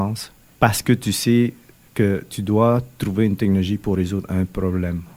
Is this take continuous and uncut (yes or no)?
yes